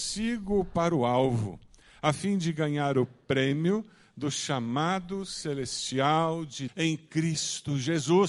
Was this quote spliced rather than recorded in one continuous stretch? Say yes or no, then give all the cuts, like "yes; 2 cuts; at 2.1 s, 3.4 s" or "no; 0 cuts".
yes; 1 cut; at 6.7 s